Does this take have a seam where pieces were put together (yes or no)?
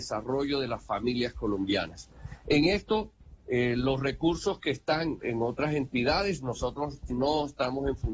yes